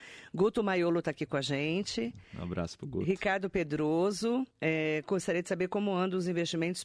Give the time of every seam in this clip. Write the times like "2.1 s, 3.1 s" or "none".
4.5 s